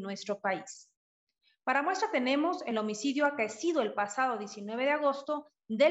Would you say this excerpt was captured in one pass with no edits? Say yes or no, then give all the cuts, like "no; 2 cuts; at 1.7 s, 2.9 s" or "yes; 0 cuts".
yes; 0 cuts